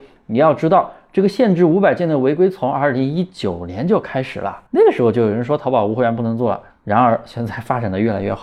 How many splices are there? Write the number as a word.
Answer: two